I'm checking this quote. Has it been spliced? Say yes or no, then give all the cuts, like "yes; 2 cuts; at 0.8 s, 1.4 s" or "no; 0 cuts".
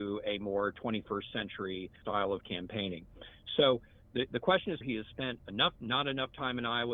yes; 4 cuts; at 2.0 s, 4.3 s, 4.8 s, 5.8 s